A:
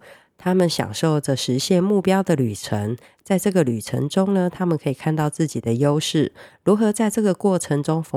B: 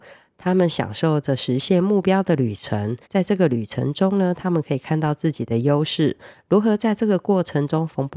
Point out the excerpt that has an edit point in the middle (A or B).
B